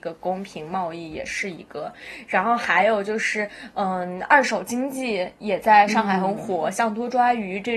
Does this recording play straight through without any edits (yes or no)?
yes